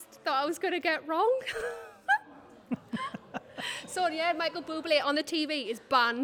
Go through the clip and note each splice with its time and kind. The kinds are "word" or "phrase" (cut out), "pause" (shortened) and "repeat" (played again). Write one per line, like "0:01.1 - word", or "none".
none

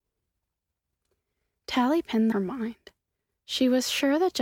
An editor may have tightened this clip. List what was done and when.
0:02.3 - phrase

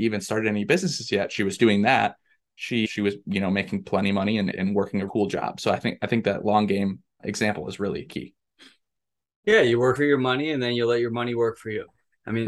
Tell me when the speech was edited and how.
0:01.6 - word
0:02.8 - word
0:04.5 - word
0:05.1 - word
0:07.2 - word
0:08.1 - word
0:10.0 - word

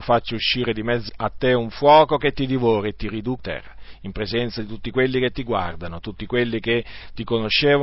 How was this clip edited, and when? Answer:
0:01.1 - word
0:03.4 - phrase

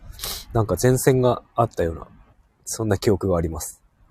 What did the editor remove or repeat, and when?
0:02.3 - pause

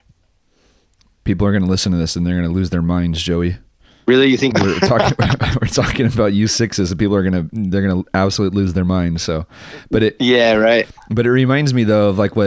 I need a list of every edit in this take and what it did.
0:03.9 - pause
0:04.5 - word

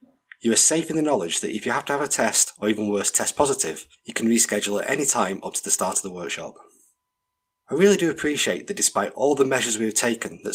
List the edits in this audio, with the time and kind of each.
none

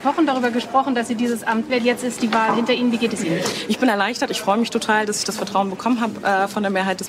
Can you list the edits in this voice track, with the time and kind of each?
0:01.7 - word

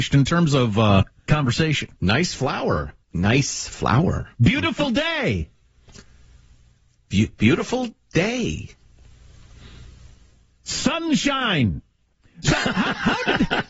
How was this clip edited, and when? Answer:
0:01.3 - word
0:02.0 - pause
0:03.0 - pause
0:04.3 - pause

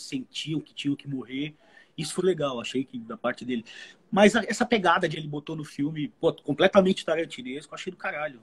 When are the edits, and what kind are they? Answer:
0:02.2 - word
0:05.1 - word

